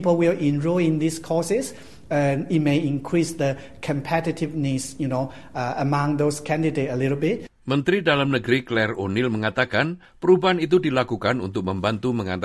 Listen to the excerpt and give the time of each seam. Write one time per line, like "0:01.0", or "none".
0:07.6